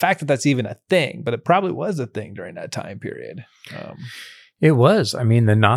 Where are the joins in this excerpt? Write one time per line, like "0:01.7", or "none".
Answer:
none